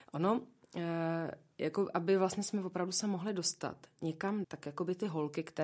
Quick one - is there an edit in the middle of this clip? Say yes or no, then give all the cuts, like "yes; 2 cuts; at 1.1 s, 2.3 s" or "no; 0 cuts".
yes; 1 cut; at 4.4 s